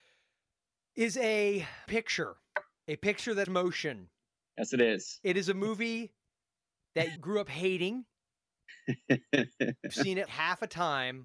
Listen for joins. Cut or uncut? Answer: cut